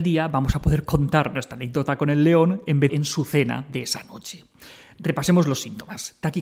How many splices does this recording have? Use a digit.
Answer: 1